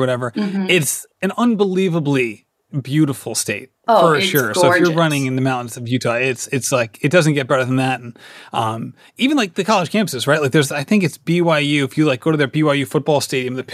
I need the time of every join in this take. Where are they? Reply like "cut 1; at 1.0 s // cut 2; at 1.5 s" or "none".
cut 1; at 1.1 s // cut 2; at 3.8 s